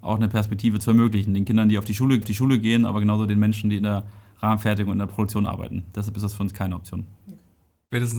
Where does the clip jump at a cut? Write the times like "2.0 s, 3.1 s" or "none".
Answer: 2.2 s